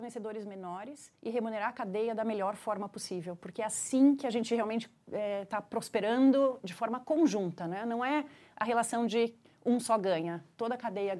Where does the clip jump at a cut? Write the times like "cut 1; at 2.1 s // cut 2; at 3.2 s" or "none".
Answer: none